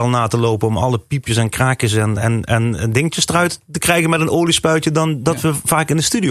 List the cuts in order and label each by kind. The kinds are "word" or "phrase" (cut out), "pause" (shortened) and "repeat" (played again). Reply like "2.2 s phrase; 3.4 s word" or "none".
none